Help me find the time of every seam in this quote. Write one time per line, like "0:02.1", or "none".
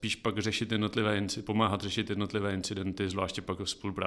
none